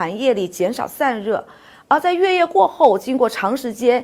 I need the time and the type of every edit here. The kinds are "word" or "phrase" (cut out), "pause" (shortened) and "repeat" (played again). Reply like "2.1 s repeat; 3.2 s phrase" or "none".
none